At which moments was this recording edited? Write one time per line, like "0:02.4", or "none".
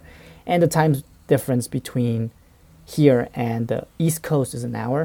none